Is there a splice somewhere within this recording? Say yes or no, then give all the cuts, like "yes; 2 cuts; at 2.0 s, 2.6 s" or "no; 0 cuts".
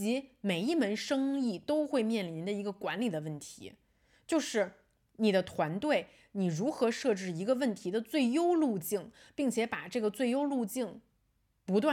no; 0 cuts